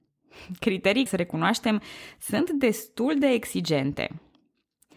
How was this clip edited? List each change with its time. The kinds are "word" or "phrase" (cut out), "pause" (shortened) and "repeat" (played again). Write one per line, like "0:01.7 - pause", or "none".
0:01.1 - word